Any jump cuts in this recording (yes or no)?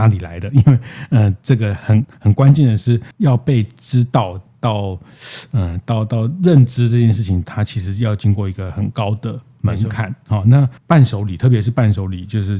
yes